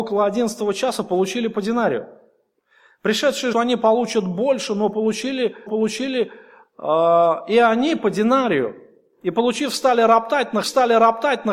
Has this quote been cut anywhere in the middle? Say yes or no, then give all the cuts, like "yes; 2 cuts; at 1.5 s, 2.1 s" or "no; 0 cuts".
yes; 3 cuts; at 3.5 s, 5.7 s, 10.6 s